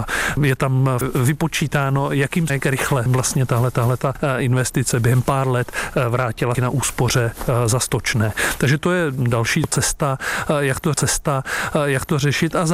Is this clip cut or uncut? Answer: cut